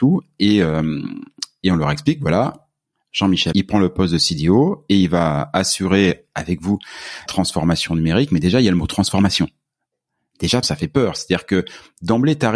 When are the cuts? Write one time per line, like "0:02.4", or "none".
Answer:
0:03.5
0:07.3
0:10.6